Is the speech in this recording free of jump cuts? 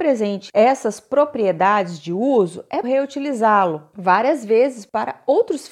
no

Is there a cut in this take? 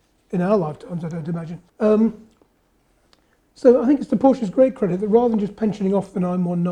yes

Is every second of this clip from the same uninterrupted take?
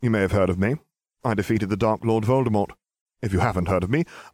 yes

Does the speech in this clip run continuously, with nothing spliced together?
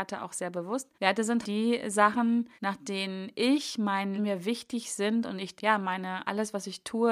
no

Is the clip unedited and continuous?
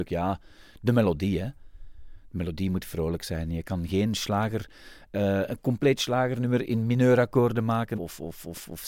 no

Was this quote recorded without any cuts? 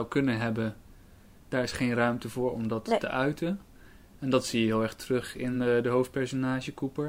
yes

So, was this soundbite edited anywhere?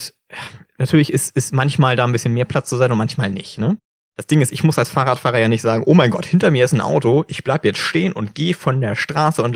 no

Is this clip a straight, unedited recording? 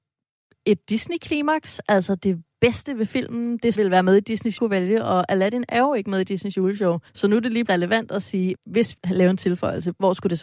no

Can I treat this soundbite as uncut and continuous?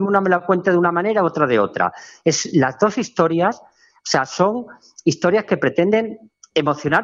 yes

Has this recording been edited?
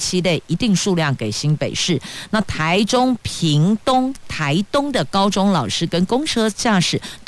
no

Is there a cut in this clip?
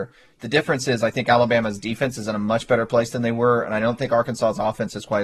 no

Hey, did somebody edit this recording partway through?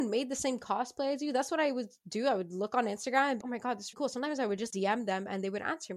yes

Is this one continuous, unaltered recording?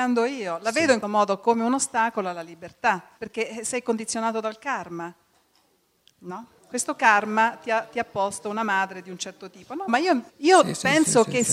no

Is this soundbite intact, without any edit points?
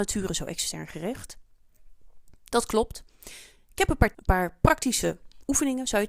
no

